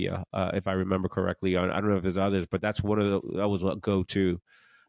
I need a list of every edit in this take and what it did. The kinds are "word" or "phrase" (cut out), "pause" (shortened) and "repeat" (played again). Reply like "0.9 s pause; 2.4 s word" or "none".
none